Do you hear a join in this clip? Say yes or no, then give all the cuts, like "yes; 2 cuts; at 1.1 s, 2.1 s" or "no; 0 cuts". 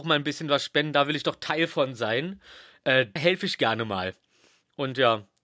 yes; 1 cut; at 3.2 s